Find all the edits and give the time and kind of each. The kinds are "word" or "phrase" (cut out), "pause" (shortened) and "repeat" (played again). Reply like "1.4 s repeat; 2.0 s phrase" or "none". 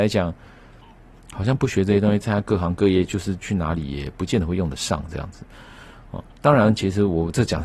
6.3 s pause